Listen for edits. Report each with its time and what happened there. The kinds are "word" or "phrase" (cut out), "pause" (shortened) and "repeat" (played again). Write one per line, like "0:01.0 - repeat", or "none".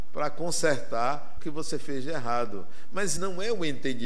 0:01.4 - word
0:03.2 - word